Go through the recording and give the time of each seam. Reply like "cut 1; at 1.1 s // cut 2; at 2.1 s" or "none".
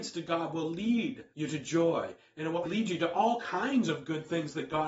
cut 1; at 1.3 s // cut 2; at 2.6 s